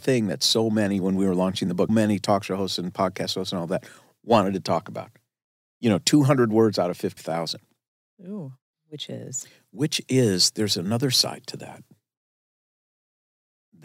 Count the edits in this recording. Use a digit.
2